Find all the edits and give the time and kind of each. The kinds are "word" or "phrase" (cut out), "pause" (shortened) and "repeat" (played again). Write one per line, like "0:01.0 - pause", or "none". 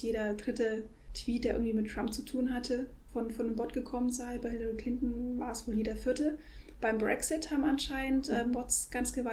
none